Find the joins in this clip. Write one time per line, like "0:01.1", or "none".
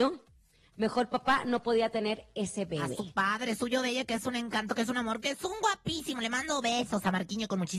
none

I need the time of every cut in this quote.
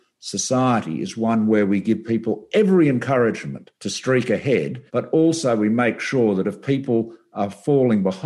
0:03.7
0:04.9

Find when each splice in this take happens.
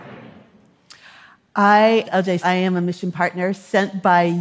0:02.0
0:02.4

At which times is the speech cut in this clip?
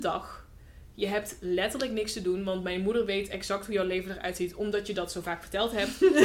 none

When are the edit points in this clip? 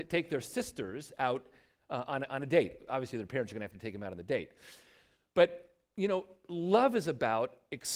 none

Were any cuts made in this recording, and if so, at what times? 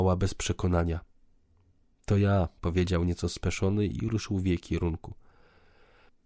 none

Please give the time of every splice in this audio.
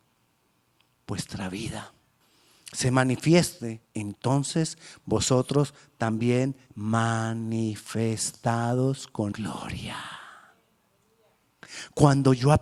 0:02.2
0:03.8
0:06.7
0:09.3

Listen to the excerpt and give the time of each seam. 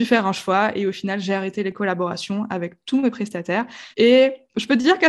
0:03.9

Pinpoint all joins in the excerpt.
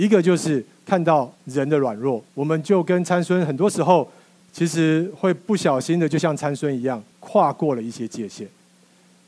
0:01.3
0:02.3
0:04.4
0:07.1

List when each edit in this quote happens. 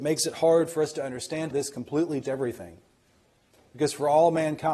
0:01.5
0:02.2

